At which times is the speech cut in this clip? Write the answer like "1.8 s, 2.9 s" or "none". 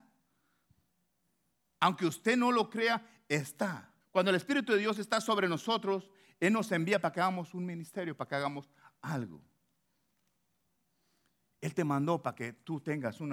4.0 s